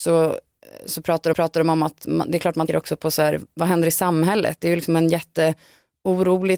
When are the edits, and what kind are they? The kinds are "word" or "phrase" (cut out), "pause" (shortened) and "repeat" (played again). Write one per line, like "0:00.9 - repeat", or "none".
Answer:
0:01.3 - repeat
0:02.7 - word

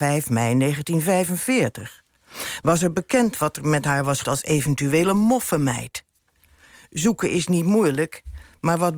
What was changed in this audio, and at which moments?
0:04.2 - word

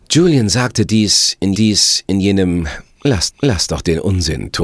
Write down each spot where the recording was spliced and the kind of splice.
0:01.5 - repeat
0:03.3 - repeat

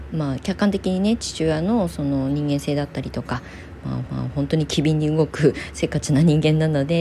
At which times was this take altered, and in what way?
0:04.1 - repeat

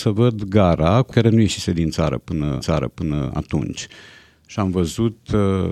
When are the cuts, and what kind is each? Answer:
0:01.1 - phrase
0:02.6 - repeat

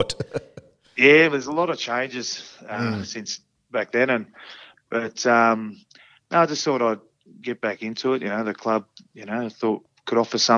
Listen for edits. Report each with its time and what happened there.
0:01.3 - word
0:09.1 - word

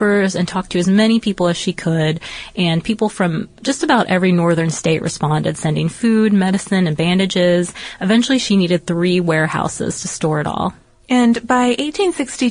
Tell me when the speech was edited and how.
none

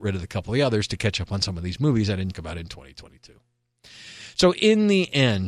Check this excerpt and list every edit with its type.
0:02.3 - word

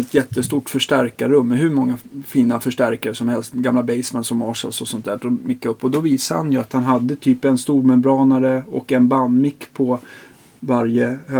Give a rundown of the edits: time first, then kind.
none

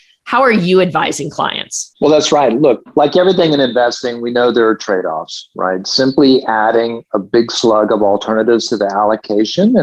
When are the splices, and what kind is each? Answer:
0:01.9 - pause

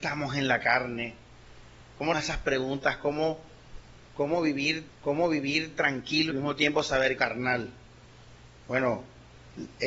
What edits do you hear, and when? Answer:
0:02.1 - word
0:04.9 - repeat
0:06.3 - word
0:07.2 - phrase
0:08.6 - pause

